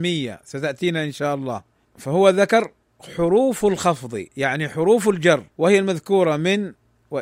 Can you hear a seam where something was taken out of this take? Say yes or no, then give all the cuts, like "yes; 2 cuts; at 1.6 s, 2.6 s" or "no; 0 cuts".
yes; 3 cuts; at 1.8 s, 4.3 s, 5.5 s